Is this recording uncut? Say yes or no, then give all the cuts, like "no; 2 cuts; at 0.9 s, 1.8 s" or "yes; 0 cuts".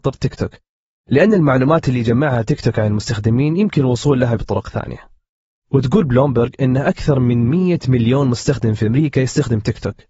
no; 1 cut; at 4.4 s